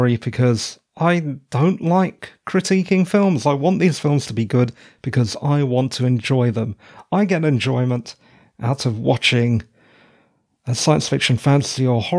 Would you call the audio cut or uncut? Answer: uncut